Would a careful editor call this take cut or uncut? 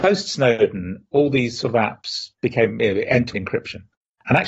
cut